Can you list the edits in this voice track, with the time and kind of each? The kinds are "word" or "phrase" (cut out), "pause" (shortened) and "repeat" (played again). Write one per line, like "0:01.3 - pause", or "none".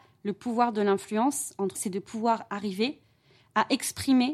0:01.7 - word